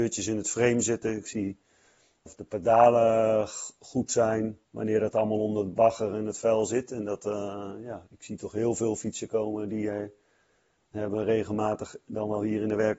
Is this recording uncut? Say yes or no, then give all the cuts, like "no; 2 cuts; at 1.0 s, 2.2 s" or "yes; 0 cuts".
no; 3 cuts; at 2.3 s, 4.7 s, 8.1 s